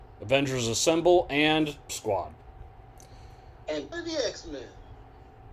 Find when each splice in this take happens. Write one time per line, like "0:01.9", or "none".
0:01.9
0:03.9